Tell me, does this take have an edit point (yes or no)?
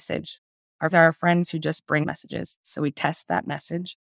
yes